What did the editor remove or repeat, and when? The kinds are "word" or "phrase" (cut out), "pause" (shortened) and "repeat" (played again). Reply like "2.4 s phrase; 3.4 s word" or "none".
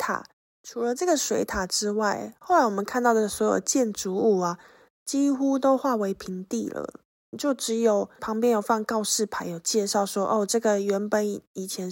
none